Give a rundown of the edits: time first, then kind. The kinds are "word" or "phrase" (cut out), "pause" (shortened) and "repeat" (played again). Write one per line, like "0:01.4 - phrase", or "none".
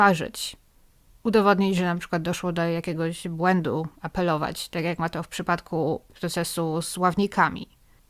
0:06.1 - pause